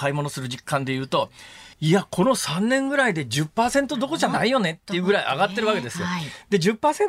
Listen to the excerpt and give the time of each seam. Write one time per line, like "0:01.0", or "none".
0:01.7